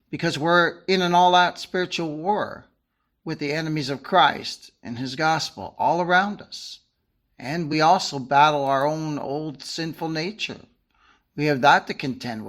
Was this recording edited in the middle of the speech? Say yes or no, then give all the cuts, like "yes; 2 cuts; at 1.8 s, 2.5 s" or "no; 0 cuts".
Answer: no; 0 cuts